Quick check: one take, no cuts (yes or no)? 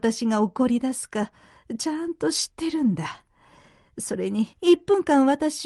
no